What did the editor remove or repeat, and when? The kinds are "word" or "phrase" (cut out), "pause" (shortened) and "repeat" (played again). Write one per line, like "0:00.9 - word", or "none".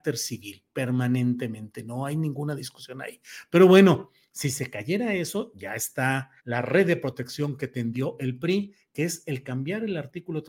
0:06.4 - pause